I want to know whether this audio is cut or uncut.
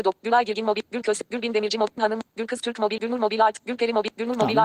cut